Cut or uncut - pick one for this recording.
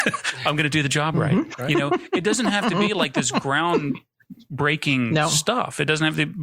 uncut